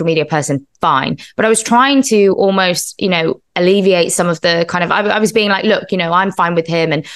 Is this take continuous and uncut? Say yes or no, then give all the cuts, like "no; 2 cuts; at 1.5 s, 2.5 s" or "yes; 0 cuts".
yes; 0 cuts